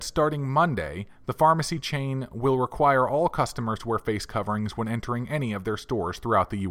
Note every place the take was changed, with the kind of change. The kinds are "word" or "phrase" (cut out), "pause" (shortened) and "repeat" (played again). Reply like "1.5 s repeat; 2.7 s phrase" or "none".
none